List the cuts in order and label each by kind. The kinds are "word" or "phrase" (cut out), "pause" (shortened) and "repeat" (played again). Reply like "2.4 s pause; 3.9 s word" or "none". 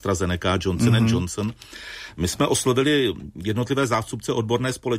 none